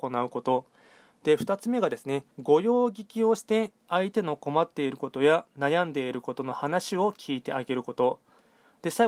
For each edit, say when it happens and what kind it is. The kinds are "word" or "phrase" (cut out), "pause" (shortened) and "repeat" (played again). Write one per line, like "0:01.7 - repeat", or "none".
0:02.3 - pause